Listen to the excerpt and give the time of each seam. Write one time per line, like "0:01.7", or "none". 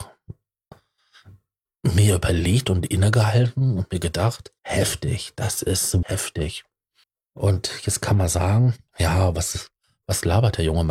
0:04.6
0:06.0
0:07.0